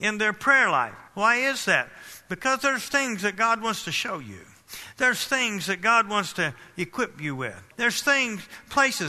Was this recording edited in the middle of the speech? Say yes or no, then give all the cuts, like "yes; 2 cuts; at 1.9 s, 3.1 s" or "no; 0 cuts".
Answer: yes; 2 cuts; at 1.1 s, 7.7 s